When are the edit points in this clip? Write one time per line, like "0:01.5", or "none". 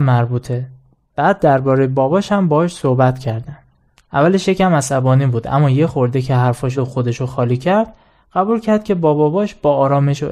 0:06.7